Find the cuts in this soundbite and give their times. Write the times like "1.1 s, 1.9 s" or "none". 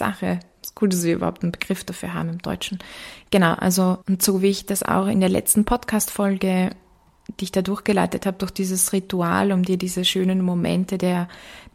4.0 s